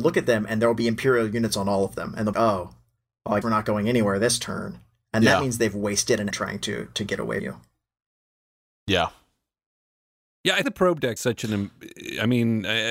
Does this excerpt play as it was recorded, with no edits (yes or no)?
no